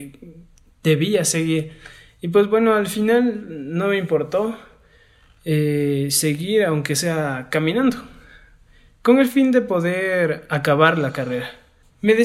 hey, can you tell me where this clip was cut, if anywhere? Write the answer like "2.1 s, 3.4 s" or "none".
none